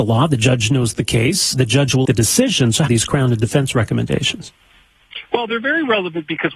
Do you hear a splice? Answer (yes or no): yes